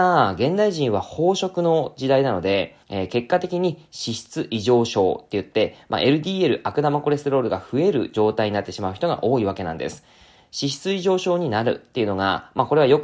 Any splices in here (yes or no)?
yes